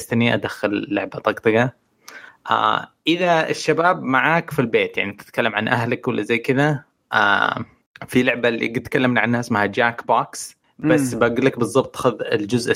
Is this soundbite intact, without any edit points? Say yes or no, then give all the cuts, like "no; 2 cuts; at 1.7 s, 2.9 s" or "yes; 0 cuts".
yes; 0 cuts